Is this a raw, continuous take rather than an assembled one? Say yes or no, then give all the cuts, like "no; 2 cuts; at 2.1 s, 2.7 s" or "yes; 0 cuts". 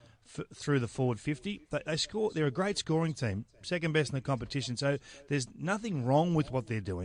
yes; 0 cuts